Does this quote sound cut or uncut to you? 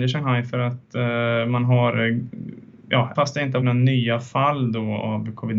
cut